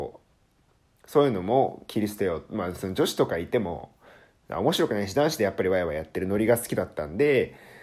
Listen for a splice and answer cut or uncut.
uncut